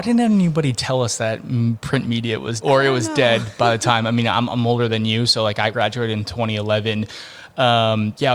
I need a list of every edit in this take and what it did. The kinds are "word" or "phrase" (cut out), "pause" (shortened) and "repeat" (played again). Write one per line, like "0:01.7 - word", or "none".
0:02.6 - word
0:05.7 - phrase

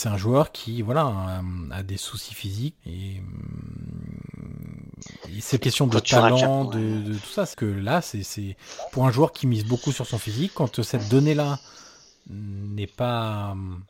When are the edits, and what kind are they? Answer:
0:02.8 - word
0:05.6 - word
0:07.5 - word

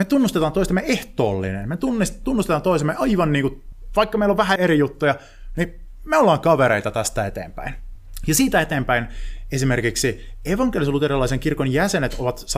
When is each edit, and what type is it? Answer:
0:04.6 - word

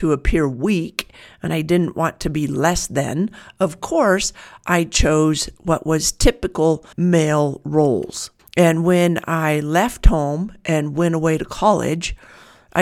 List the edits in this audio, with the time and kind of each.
0:06.9 - pause
0:08.4 - pause

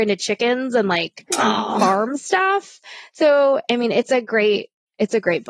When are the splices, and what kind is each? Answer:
none

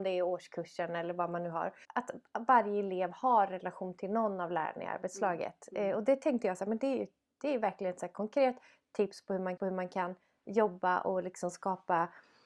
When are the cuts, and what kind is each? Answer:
0:01.8 - word
0:09.6 - repeat

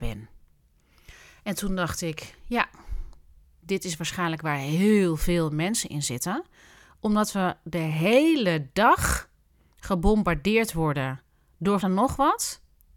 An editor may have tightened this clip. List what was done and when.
0:11.8 - phrase

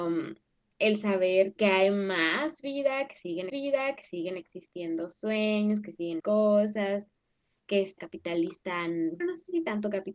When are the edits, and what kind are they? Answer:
0:01.6 - word
0:03.5 - repeat
0:06.2 - phrase
0:08.0 - word
0:09.2 - word

